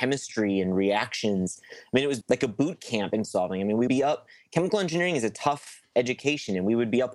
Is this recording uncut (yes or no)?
no